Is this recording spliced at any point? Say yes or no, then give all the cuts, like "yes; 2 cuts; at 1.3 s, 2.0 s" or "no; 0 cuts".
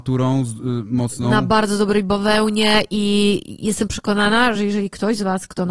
no; 0 cuts